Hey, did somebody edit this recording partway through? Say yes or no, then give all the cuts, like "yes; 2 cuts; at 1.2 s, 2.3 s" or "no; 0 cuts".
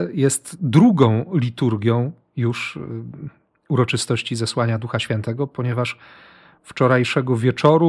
no; 0 cuts